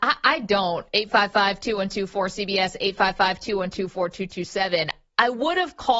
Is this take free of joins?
yes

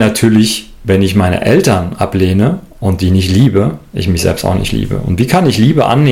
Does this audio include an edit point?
no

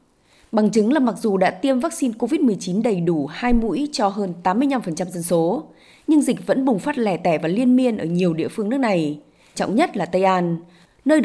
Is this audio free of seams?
no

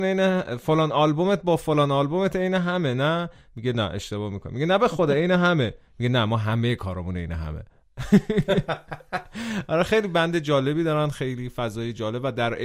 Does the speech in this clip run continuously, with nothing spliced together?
yes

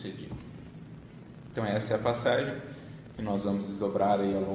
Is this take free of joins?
yes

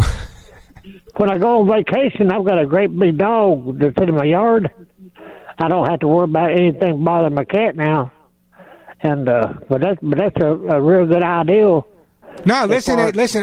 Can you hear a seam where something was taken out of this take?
no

